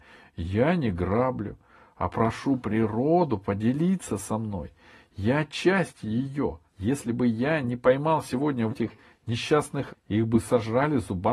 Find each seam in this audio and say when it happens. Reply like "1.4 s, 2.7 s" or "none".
6.7 s, 8.7 s, 9.9 s